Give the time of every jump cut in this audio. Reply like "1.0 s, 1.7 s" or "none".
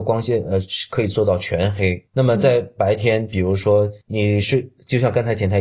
2.1 s, 4.0 s